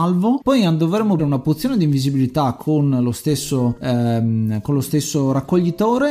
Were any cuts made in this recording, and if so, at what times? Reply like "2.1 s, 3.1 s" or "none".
1.2 s